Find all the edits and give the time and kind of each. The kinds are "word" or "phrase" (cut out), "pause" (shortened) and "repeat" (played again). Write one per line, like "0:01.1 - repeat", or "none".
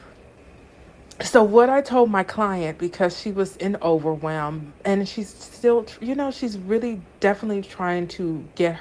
none